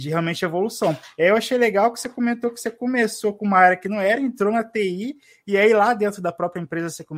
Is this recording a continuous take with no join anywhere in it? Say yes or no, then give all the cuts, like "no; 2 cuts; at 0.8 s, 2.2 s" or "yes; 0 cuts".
yes; 0 cuts